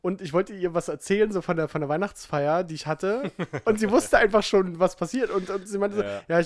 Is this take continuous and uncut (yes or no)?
yes